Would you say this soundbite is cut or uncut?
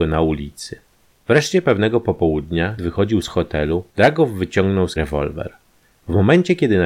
cut